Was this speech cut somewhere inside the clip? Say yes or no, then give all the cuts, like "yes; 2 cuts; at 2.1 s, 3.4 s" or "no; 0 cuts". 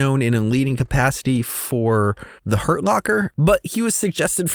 yes; 1 cut; at 2.4 s